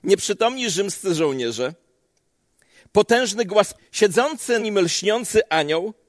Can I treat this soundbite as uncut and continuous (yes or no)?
no